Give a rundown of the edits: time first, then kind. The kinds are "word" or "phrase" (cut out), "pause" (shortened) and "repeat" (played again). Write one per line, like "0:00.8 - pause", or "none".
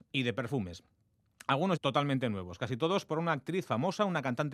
0:01.8 - phrase
0:03.1 - word